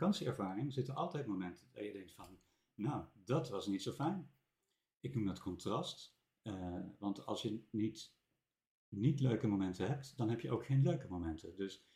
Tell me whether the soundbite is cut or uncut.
uncut